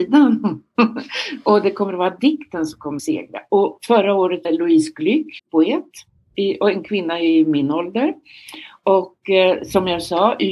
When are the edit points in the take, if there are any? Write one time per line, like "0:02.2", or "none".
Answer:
0:03.0
0:04.4
0:05.4